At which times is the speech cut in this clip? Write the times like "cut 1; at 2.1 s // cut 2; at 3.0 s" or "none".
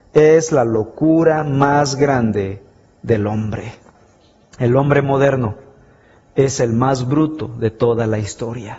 none